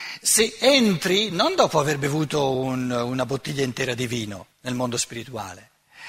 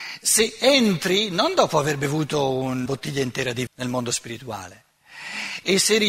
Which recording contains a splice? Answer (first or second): second